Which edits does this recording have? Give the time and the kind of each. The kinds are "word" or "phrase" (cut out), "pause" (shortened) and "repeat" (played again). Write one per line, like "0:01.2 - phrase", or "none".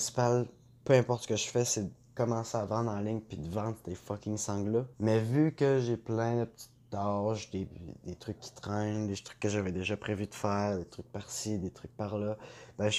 0:04.9 - pause